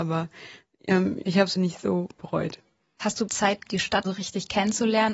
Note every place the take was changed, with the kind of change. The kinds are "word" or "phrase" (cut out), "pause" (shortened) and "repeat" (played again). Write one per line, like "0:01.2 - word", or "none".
0:01.2 - word
0:01.6 - word
0:03.3 - word
0:03.6 - word
0:04.0 - word